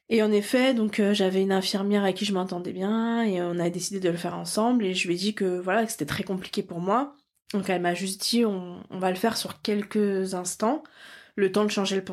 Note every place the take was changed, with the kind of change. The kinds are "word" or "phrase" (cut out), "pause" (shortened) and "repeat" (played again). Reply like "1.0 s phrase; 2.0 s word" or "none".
none